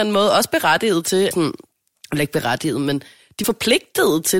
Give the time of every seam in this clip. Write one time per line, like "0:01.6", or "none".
0:01.3
0:03.4